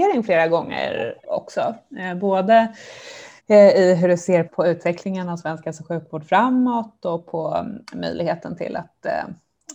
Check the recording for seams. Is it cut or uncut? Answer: cut